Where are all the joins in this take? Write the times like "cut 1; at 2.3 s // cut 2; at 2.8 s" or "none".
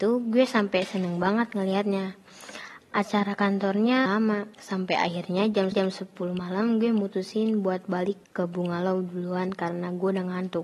cut 1; at 4.1 s // cut 2; at 4.5 s // cut 3; at 5.7 s // cut 4; at 8.2 s